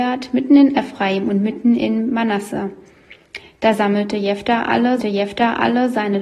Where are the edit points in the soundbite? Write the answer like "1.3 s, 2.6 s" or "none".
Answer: 5.0 s